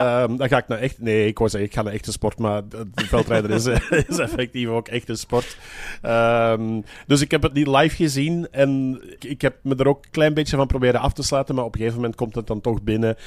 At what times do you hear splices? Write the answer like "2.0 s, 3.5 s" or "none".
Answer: 7.5 s, 9.2 s